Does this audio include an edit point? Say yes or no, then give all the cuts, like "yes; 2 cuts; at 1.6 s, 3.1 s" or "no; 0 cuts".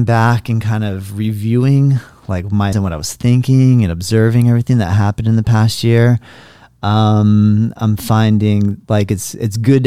yes; 1 cut; at 2.7 s